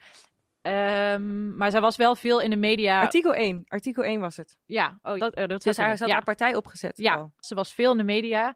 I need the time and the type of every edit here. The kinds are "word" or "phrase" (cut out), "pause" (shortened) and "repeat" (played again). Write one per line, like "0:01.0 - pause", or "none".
0:04.6 - pause
0:05.2 - word
0:07.4 - pause